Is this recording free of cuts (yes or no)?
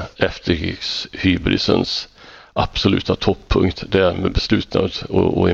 yes